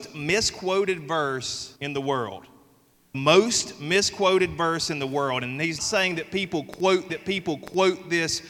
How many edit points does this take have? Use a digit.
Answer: 4